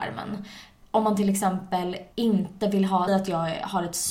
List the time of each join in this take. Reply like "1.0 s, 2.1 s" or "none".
2.1 s, 3.1 s